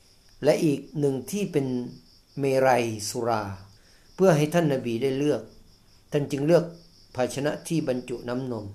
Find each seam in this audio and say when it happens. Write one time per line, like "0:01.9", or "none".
0:00.9
0:02.2
0:03.8